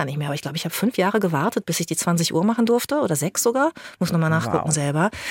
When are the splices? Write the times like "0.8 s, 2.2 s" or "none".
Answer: none